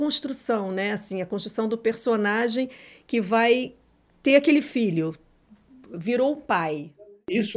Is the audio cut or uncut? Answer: uncut